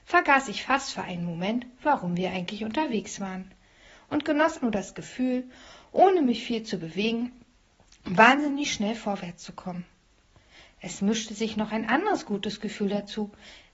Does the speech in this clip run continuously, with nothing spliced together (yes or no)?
no